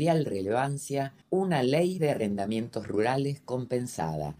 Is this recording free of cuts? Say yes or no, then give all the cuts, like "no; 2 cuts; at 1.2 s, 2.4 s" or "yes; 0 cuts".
no; 1 cut; at 1.2 s